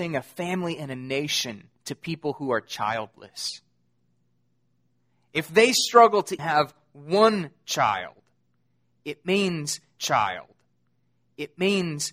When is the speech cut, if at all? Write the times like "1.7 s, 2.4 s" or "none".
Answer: 1.7 s, 6.4 s, 10.0 s

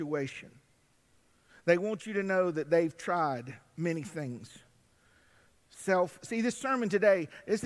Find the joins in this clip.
none

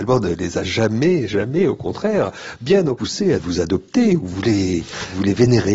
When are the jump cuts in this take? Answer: 1.3 s, 3.0 s, 3.4 s, 4.3 s

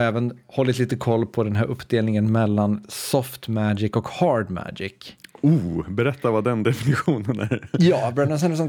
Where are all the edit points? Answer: none

